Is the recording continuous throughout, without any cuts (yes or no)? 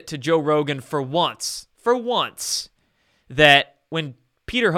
yes